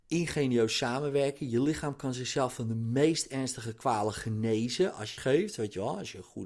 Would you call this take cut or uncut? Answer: cut